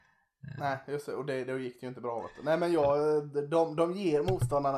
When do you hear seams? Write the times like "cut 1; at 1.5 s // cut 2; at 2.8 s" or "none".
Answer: none